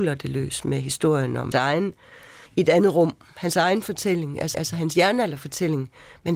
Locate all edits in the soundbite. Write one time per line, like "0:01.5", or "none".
0:01.5
0:02.5
0:04.5